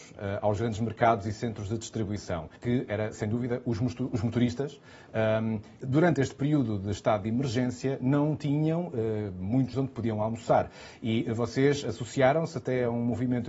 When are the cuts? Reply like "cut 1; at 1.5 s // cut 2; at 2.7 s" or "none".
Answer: cut 1; at 2.6 s // cut 2; at 5.8 s // cut 3; at 9.7 s